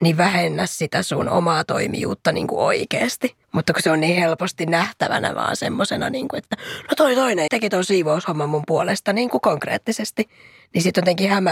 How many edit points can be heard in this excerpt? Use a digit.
2